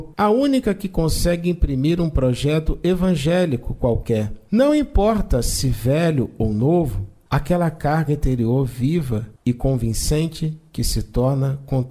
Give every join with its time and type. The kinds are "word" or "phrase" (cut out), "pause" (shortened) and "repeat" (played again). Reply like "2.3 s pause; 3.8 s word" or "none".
none